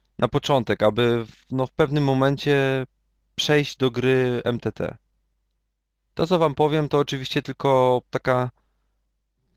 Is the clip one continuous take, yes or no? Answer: yes